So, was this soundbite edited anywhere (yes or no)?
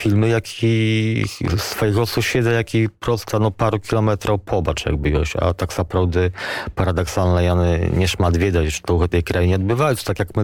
no